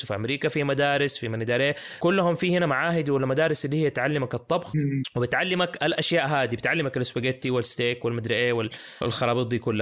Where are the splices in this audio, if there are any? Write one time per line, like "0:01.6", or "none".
none